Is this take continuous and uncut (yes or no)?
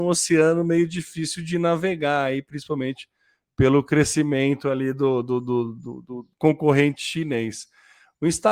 no